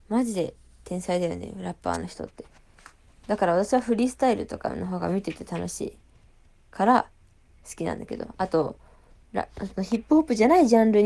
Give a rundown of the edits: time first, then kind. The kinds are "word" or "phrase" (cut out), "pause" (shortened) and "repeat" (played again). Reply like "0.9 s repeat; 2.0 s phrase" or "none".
none

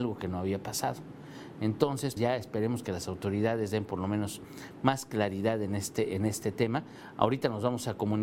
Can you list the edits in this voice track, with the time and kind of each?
2.2 s word

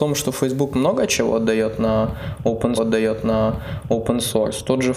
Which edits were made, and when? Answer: 2.8 s repeat

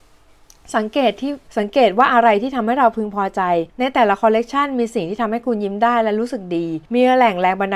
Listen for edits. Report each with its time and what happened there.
1.5 s pause; 3.7 s pause; 6.9 s pause

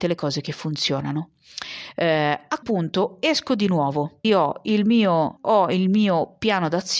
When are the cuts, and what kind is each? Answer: 2.6 s word; 4.2 s word; 5.4 s word

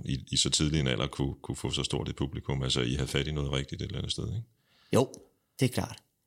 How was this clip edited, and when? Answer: none

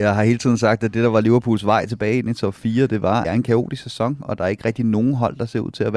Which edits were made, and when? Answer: 3.2 s phrase

